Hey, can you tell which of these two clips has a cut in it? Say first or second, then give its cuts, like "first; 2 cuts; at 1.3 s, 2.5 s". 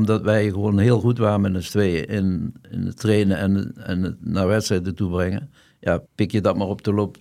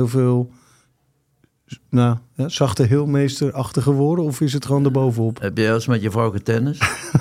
first; 1 cut; at 6.1 s